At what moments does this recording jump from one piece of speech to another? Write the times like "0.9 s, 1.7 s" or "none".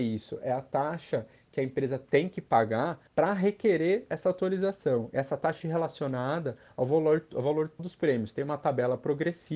3.1 s, 5.6 s, 7.8 s